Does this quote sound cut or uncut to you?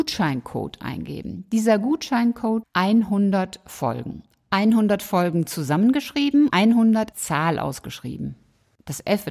cut